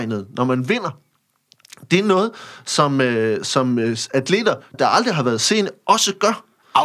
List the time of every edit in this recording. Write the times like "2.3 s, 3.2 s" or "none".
4.7 s